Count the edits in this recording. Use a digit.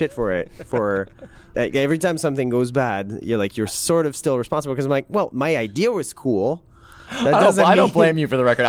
0